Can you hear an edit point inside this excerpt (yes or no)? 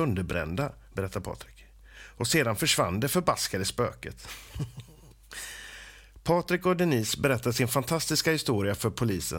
no